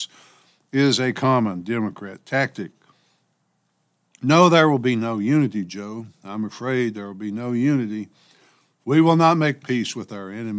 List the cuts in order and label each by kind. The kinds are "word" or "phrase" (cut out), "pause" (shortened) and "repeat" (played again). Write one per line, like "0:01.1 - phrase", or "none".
none